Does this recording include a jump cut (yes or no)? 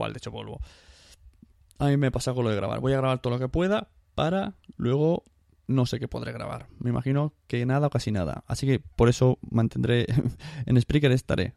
no